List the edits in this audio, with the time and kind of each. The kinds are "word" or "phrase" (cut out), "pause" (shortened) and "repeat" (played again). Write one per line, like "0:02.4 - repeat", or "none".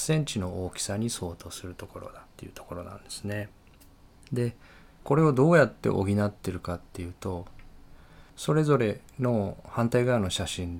0:02.3 - pause
0:04.1 - pause
0:08.3 - pause
0:09.1 - pause